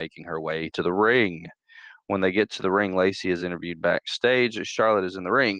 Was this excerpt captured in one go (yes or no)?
yes